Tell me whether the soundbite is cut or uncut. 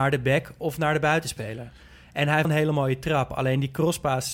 cut